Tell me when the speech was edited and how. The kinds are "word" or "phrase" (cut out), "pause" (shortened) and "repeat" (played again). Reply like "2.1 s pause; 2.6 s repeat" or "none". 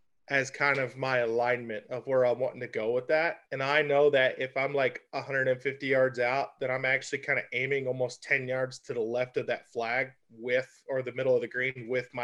3.4 s pause

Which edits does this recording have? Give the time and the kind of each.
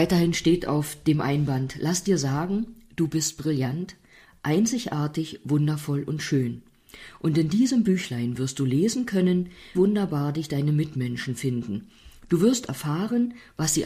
9.7 s word

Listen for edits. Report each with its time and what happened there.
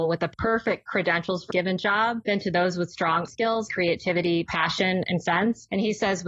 1.5 s word; 3.3 s word; 3.7 s word; 5.2 s word

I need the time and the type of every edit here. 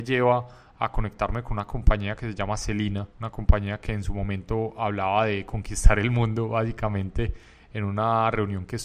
3.1 s pause

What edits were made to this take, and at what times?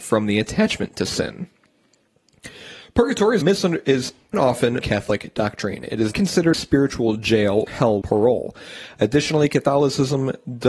3.4 s word; 4.3 s word; 4.8 s word; 6.1 s word; 6.5 s word; 7.7 s word; 8.0 s word

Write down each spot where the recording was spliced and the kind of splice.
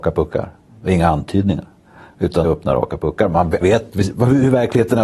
2.4 s word; 3.6 s word

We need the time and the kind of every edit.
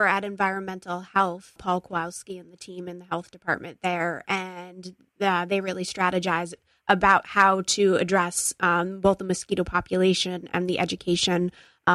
1.6 s word

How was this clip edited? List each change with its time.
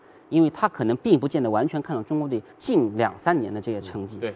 2.5 s pause

